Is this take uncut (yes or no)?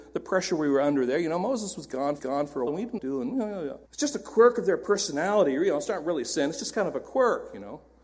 no